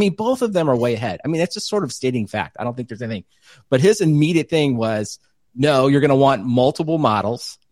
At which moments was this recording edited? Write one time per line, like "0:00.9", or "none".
none